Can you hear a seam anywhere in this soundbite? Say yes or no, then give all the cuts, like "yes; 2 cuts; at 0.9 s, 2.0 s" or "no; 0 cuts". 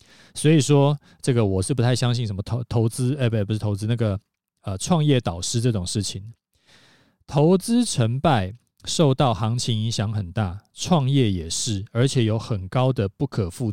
no; 0 cuts